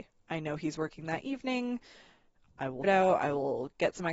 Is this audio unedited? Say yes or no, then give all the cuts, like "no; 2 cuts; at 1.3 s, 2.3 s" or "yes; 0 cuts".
no; 1 cut; at 2.8 s